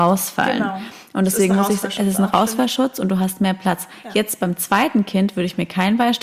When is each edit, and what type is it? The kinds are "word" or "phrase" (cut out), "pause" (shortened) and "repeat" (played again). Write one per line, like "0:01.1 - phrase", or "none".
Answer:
none